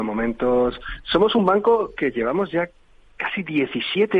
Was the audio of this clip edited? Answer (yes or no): no